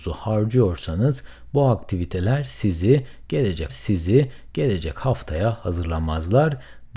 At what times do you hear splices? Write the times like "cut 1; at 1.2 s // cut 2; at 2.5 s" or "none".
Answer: cut 1; at 3.7 s